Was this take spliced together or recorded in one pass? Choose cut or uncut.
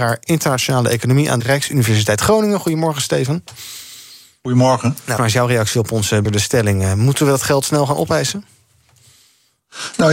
cut